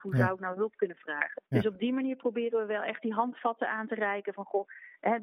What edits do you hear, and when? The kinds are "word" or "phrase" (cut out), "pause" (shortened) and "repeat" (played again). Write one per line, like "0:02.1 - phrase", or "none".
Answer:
0:01.5 - pause